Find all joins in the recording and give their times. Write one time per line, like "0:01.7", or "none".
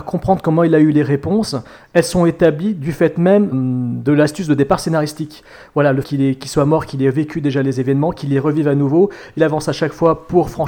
0:03.5
0:06.0
0:09.4